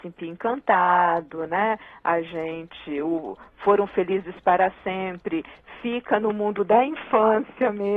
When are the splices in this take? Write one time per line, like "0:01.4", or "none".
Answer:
none